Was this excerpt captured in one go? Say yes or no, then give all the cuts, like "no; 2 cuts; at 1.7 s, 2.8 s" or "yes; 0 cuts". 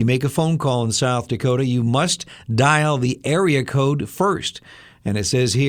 yes; 0 cuts